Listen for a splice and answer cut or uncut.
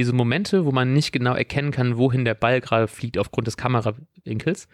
uncut